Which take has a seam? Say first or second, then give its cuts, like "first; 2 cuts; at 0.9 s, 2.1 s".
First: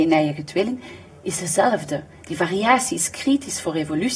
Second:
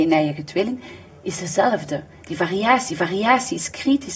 second; 1 cut; at 2.9 s